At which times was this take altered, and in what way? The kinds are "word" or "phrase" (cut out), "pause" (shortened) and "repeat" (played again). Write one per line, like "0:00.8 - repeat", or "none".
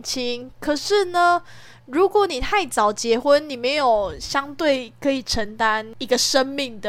none